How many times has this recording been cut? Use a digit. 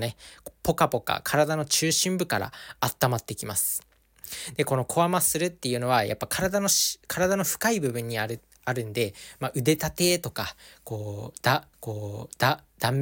2